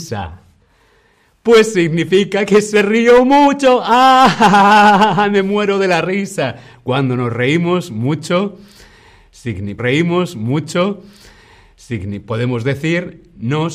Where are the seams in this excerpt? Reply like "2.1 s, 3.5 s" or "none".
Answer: 9.8 s